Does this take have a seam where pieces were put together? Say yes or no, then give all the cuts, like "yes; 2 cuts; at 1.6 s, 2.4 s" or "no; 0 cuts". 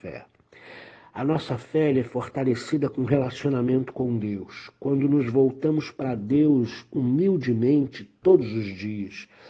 no; 0 cuts